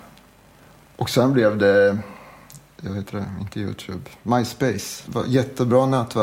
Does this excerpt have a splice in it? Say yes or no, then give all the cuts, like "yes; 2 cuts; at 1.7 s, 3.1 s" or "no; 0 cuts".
no; 0 cuts